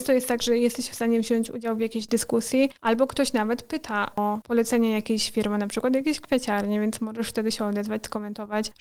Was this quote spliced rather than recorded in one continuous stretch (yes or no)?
no